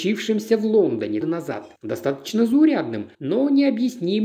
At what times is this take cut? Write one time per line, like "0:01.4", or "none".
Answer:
0:01.2
0:01.8
0:03.1